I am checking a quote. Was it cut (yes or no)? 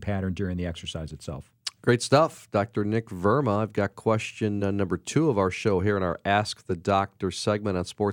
no